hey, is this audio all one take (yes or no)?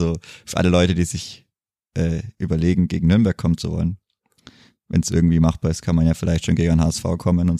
yes